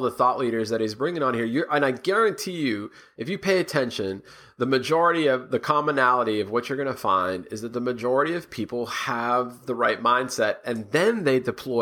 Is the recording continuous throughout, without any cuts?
yes; 0 cuts

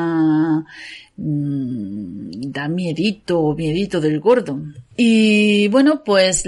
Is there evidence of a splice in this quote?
yes; 1 cut; at 4.9 s

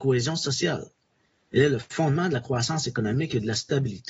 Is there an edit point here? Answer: no; 0 cuts

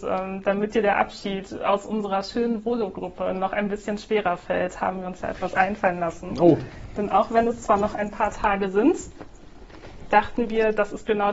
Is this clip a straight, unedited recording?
yes; 0 cuts

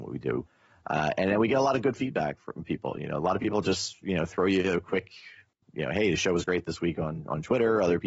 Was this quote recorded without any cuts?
yes; 0 cuts

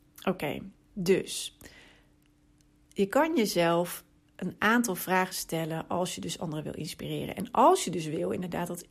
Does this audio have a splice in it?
no; 0 cuts

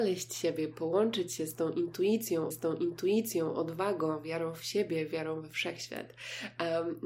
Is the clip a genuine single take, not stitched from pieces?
no; 1 cut; at 2.5 s

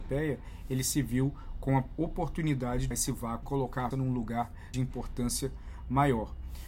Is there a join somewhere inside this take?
yes; 4 cuts; at 2.9 s, 3.4 s, 3.9 s, 4.7 s

